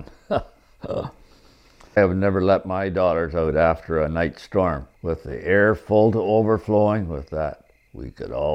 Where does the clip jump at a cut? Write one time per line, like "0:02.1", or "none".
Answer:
none